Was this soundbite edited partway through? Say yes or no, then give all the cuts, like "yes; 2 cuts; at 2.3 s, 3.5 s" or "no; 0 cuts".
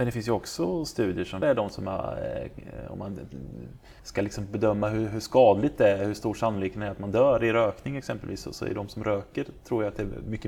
yes; 2 cuts; at 1.4 s, 4.0 s